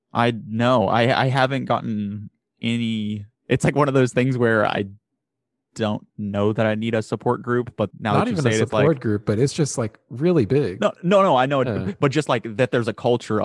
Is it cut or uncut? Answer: cut